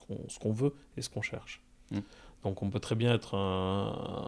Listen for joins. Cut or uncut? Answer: uncut